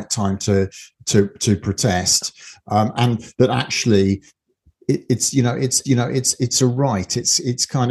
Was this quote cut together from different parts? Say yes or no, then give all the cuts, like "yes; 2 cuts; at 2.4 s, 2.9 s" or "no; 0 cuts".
yes; 1 cut; at 5.8 s